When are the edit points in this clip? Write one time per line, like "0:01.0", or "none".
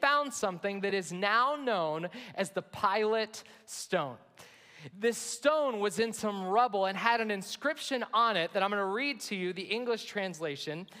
none